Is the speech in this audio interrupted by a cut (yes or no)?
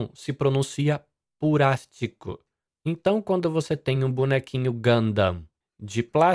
no